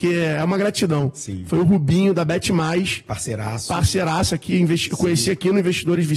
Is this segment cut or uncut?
uncut